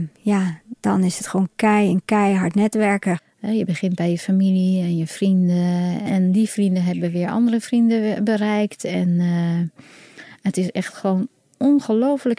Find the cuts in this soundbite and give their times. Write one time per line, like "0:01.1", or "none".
none